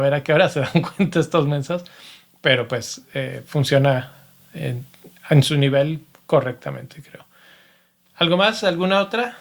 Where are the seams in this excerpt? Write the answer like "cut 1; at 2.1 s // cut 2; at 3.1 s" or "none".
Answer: none